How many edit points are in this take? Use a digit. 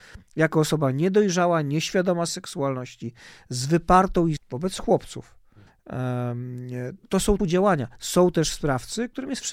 5